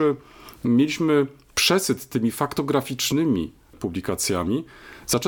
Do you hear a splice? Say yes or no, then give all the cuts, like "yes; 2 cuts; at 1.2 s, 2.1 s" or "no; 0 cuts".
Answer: no; 0 cuts